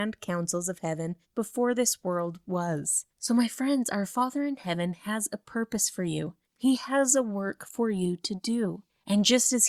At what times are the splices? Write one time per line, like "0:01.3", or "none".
0:01.2
0:03.1
0:06.4